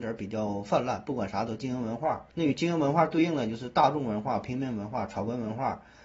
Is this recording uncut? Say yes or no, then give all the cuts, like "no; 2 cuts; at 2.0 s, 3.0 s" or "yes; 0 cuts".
no; 1 cut; at 2.3 s